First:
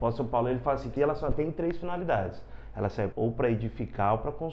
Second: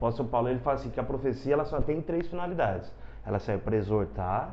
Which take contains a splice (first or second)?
first